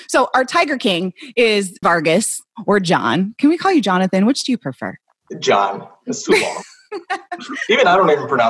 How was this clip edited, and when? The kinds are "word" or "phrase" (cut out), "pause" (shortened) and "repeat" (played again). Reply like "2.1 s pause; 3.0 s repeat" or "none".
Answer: 1.8 s word